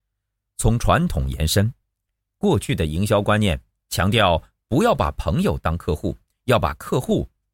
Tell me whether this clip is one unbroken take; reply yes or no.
yes